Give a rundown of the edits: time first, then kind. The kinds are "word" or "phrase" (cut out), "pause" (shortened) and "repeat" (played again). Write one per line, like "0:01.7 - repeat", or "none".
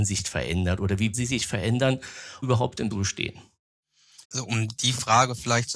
0:01.1 - word
0:02.4 - word
0:02.9 - phrase
0:04.2 - pause

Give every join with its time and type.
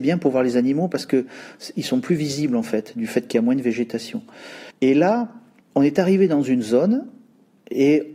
0:04.7 - pause
0:05.6 - pause

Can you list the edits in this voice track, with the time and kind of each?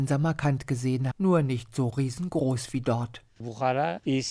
0:01.1 - word

